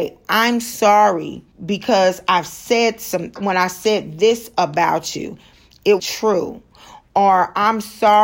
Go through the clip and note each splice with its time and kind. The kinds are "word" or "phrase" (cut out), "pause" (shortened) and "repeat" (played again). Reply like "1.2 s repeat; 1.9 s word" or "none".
1.5 s pause; 3.4 s word; 6.0 s word

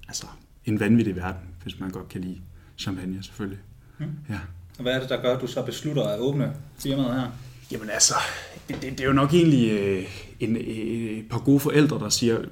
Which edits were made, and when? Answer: 4.7 s pause; 6.7 s pause; 7.6 s pause

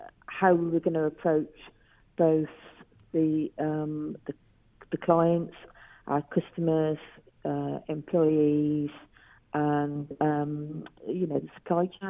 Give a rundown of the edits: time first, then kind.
none

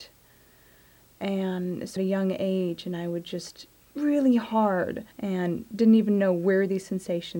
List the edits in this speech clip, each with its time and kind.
2.0 s phrase; 3.8 s phrase; 5.1 s pause

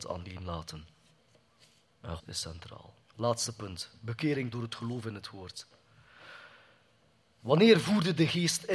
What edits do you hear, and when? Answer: 2.2 s word; 3.0 s pause; 4.5 s word

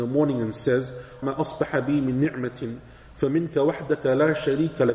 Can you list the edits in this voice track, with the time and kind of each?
1.2 s word

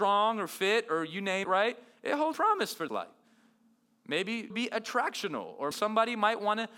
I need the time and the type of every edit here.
1.4 s word; 2.3 s word; 2.9 s word; 4.5 s word; 5.7 s word

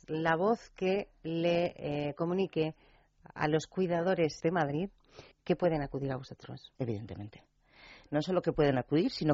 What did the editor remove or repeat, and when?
4.4 s phrase; 5.3 s pause; 6.8 s pause

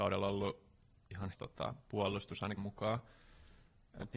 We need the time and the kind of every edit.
1.3 s phrase; 2.6 s word

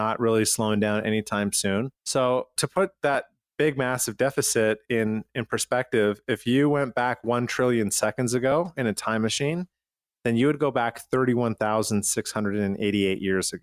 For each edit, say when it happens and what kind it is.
1.9 s pause

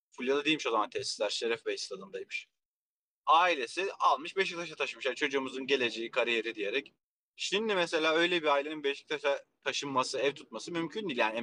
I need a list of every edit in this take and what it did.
none

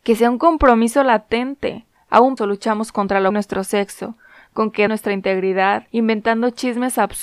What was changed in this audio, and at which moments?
2.4 s word; 3.3 s phrase; 4.9 s word; 5.9 s pause

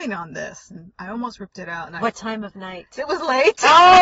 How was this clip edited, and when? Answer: none

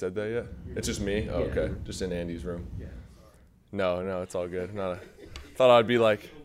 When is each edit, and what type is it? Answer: none

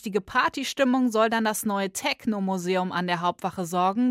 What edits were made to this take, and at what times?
none

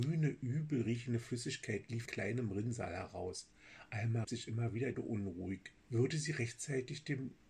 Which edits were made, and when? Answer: 2.1 s word; 4.2 s word; 4.9 s phrase; 5.8 s pause

